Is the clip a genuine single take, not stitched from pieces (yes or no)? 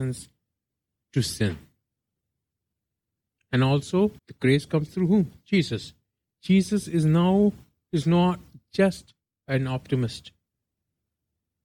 no